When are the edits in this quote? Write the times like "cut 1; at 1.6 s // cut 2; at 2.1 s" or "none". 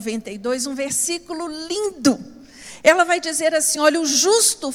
none